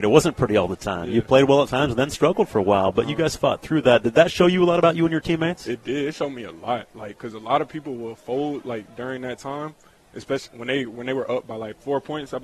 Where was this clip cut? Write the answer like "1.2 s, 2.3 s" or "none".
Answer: 10.5 s